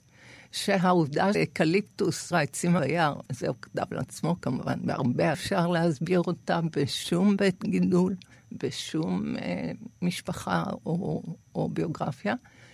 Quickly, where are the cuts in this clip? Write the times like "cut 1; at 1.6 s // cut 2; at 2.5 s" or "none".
cut 1; at 1.3 s // cut 2; at 2.3 s // cut 3; at 2.8 s // cut 4; at 3.3 s // cut 5; at 5.3 s